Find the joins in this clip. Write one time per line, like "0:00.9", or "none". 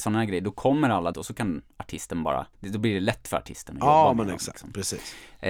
0:01.1
0:02.5